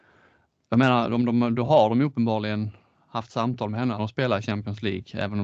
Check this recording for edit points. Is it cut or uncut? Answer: cut